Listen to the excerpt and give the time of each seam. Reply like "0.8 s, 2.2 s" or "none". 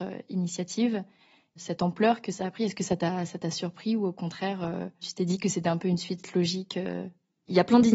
none